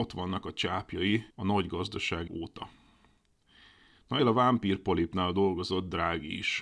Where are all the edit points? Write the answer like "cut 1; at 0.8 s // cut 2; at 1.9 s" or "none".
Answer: cut 1; at 1.3 s // cut 2; at 2.3 s // cut 3; at 4.2 s